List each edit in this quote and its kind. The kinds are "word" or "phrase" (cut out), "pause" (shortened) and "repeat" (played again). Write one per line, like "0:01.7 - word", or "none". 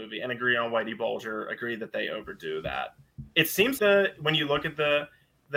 0:03.8 - word